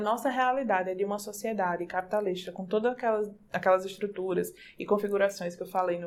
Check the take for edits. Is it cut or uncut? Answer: uncut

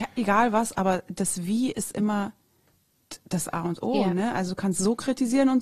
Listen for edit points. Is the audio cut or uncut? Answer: uncut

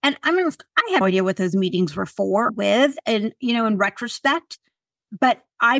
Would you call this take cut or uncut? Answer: cut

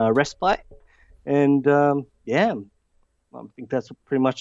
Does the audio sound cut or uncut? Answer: cut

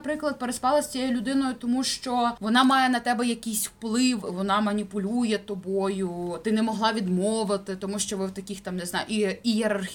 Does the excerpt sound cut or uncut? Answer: uncut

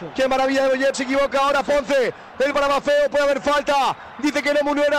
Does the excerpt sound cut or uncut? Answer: cut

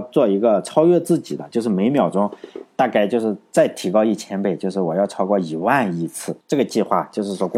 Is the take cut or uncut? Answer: cut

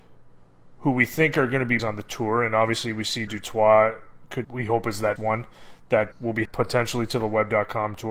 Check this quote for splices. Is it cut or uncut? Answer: cut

